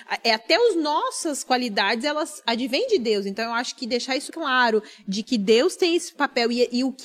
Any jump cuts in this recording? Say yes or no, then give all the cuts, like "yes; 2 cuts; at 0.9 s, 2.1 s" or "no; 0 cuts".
yes; 2 cuts; at 4.3 s, 6.1 s